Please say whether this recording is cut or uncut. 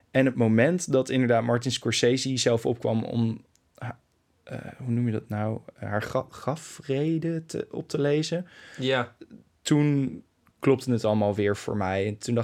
uncut